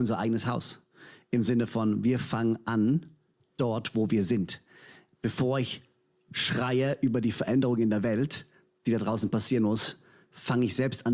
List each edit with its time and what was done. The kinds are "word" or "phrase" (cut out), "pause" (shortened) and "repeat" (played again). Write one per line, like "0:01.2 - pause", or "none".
none